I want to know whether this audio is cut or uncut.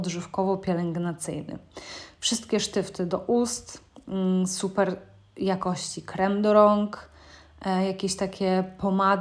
uncut